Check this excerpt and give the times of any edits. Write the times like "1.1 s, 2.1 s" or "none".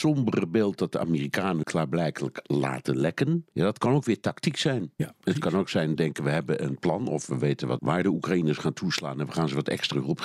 1.6 s, 3.5 s, 6.0 s, 7.8 s